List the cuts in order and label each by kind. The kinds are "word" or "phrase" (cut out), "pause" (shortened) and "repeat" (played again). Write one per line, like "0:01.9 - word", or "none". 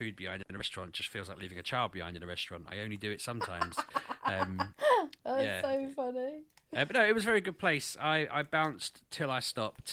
0:05.2 - word
0:06.5 - pause